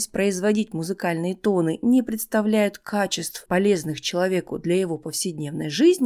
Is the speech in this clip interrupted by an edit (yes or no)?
yes